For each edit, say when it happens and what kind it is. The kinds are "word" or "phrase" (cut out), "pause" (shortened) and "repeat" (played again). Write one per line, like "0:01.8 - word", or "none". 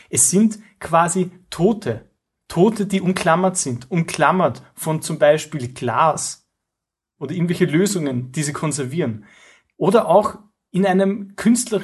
none